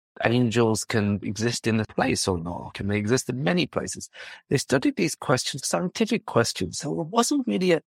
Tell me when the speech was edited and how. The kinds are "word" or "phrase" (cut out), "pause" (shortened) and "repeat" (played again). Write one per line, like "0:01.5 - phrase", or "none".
0:01.8 - word
0:05.6 - word